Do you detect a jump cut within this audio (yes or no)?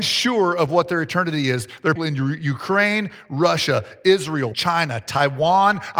yes